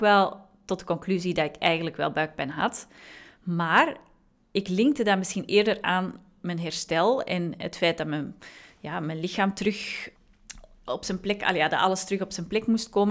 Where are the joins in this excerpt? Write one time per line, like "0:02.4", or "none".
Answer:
none